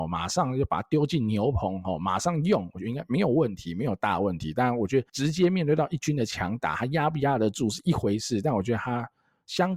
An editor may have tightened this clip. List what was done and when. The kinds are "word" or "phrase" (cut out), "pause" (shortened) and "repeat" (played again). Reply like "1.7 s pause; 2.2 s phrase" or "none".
5.1 s pause